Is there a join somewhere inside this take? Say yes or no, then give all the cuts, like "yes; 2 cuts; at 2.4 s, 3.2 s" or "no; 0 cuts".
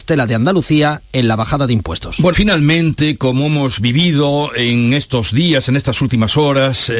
yes; 1 cut; at 2.3 s